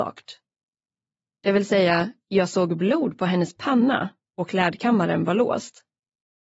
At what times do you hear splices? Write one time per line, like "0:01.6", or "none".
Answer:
none